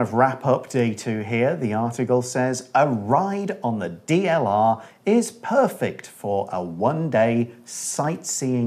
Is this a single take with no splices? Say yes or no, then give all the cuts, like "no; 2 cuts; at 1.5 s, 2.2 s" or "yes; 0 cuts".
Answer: yes; 0 cuts